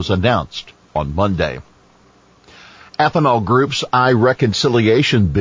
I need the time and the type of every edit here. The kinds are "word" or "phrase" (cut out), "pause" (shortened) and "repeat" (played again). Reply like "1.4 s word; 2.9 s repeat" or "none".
none